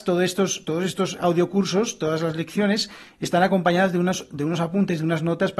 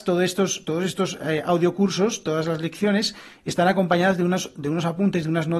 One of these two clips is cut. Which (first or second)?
first